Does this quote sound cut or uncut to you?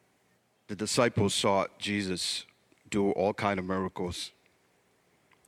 uncut